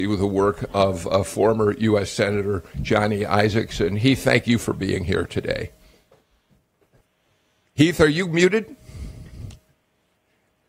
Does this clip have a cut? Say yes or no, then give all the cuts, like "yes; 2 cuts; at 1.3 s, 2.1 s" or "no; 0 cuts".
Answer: no; 0 cuts